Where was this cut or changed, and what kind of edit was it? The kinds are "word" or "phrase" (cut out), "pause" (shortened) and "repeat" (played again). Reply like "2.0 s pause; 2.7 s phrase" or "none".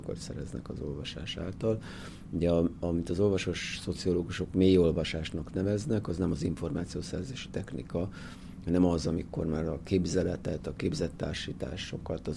none